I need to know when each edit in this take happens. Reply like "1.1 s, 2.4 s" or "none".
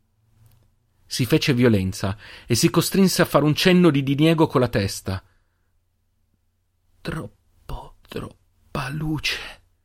8.0 s